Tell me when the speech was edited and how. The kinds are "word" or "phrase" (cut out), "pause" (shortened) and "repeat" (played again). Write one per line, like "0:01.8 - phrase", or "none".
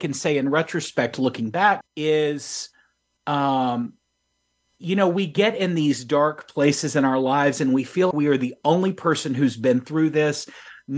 0:01.8 - word
0:08.1 - word